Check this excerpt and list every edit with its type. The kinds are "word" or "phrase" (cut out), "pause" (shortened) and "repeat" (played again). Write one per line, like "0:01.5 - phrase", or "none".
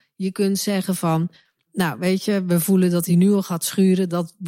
none